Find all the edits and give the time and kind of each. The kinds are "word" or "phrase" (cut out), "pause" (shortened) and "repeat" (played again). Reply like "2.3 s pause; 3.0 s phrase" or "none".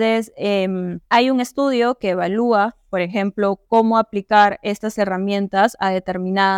1.1 s pause

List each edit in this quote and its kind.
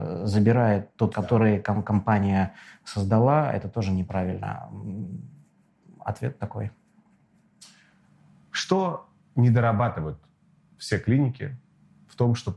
1.1 s word

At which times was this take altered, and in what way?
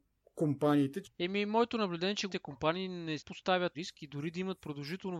1.0 s word; 2.3 s word; 3.2 s word; 3.7 s phrase

